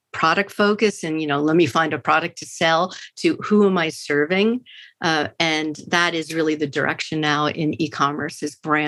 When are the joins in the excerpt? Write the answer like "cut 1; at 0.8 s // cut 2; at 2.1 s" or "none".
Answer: none